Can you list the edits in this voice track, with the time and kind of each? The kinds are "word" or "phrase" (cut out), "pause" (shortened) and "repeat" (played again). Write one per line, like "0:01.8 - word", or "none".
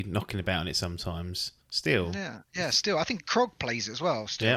0:01.6 - pause
0:02.4 - pause